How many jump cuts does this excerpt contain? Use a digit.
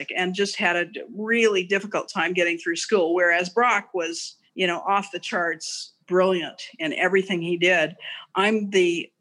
2